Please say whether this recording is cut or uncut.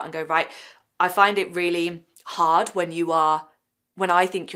uncut